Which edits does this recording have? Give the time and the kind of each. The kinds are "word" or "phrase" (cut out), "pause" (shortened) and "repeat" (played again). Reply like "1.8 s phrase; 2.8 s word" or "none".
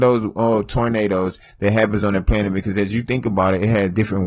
none